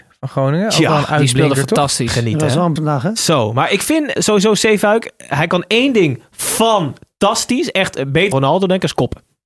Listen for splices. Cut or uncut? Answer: cut